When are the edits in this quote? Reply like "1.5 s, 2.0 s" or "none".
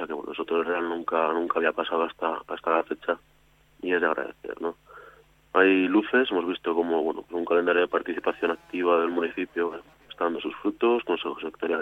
none